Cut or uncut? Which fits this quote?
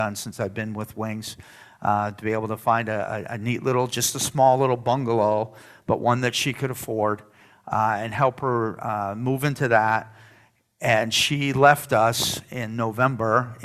uncut